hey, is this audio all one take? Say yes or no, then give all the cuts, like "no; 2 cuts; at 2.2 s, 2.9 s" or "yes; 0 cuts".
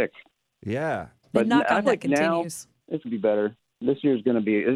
no; 3 cuts; at 1.2 s, 1.8 s, 3.0 s